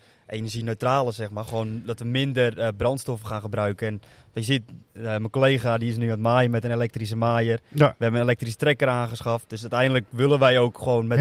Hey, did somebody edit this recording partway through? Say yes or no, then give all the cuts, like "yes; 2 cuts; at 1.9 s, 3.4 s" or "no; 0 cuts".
no; 0 cuts